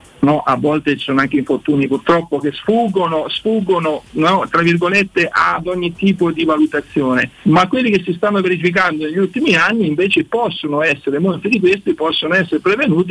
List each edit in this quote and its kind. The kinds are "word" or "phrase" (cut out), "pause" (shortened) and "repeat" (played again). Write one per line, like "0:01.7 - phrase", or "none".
0:07.4 - pause